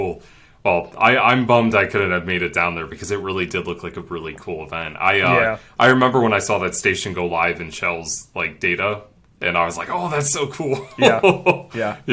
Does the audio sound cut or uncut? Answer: uncut